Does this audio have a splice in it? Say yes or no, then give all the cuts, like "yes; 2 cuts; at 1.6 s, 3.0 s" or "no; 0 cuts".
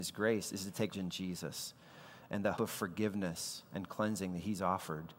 yes; 2 cuts; at 0.9 s, 2.5 s